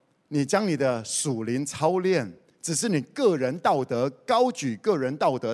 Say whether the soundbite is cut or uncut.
uncut